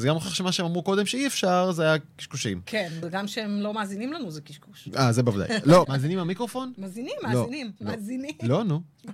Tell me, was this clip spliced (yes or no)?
yes